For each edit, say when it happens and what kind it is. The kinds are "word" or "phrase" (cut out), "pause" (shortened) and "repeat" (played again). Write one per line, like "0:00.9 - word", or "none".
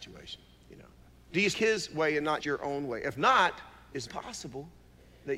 0:01.1 - pause
0:01.5 - word
0:02.4 - word
0:04.1 - word